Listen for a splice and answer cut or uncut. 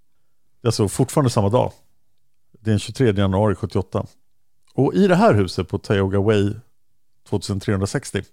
uncut